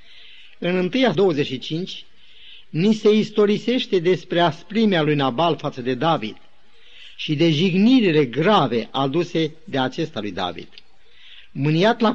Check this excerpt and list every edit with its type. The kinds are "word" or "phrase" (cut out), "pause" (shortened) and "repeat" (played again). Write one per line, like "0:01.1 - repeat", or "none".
0:01.1 - word